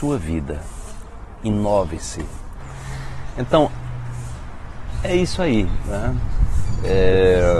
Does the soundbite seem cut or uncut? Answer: uncut